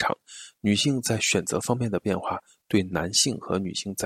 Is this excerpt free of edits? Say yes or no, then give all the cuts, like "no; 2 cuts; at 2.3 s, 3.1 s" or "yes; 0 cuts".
yes; 0 cuts